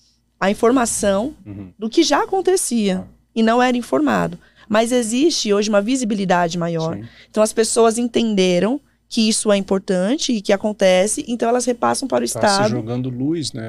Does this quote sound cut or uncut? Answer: uncut